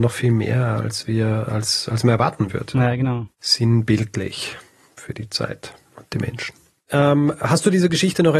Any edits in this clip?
no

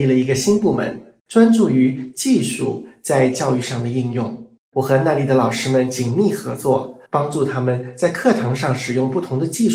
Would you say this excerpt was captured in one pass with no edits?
no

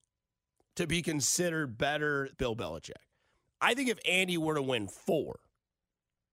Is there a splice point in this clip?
yes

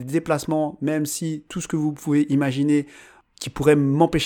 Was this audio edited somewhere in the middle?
no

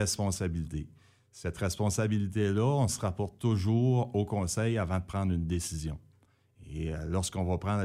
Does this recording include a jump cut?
no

